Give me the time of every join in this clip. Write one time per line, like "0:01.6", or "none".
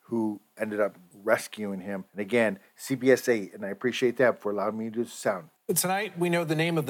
0:01.1
0:02.1
0:05.6

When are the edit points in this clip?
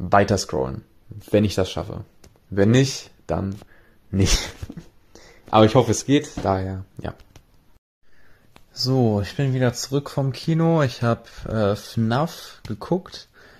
none

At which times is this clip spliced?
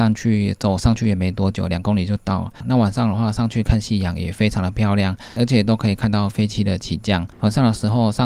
0:07.3

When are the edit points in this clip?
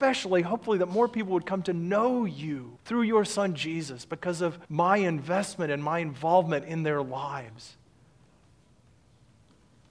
0:02.8
0:04.6

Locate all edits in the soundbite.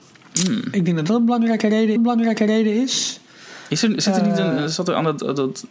0:02.0

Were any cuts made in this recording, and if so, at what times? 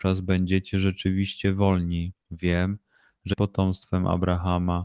0:02.2
0:03.3

